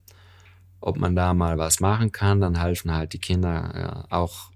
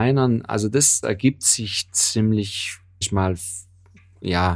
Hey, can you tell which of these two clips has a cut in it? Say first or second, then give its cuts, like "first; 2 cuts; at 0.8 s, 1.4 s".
second; 2 cuts; at 1.0 s, 3.0 s